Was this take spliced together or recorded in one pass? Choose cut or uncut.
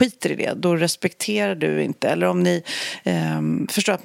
uncut